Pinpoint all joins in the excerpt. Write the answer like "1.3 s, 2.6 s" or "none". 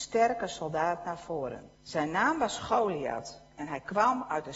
1.7 s